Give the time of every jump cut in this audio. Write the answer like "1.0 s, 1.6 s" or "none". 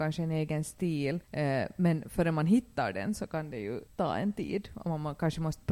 1.2 s, 3.9 s